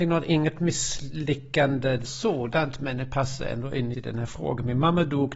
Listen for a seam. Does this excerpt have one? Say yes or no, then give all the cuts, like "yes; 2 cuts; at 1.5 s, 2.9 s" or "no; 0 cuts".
yes; 2 cuts; at 2.0 s, 3.9 s